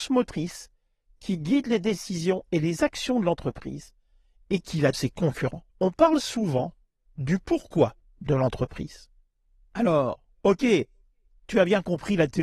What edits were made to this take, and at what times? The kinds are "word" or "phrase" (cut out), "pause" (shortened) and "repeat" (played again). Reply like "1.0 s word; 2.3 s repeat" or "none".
4.9 s phrase; 5.7 s pause